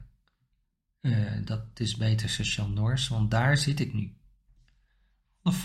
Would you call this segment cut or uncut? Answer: uncut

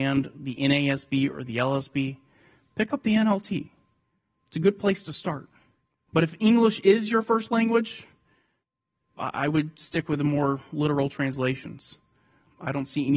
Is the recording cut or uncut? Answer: uncut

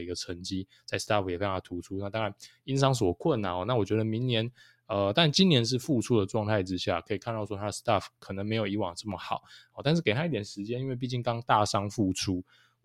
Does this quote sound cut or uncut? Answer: uncut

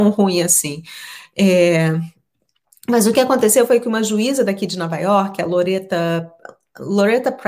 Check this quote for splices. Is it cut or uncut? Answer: uncut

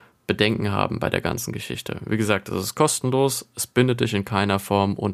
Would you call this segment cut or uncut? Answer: uncut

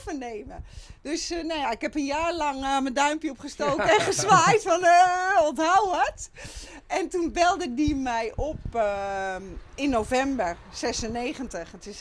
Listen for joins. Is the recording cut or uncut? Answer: uncut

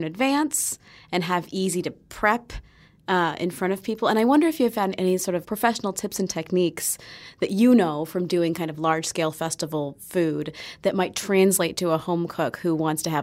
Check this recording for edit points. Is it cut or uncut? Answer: cut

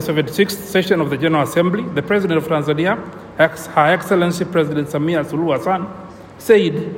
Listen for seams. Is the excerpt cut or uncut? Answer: uncut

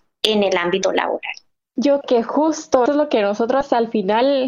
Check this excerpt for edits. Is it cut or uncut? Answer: cut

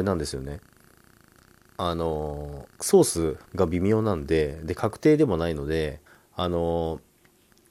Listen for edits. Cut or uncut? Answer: cut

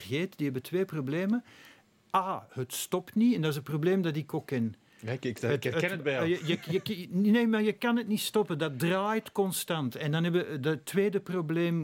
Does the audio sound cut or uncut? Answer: uncut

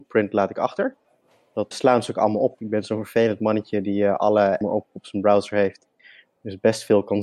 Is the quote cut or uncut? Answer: cut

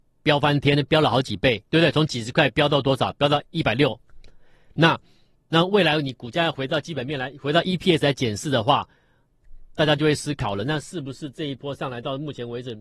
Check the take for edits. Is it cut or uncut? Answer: cut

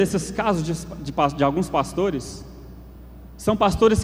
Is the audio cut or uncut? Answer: uncut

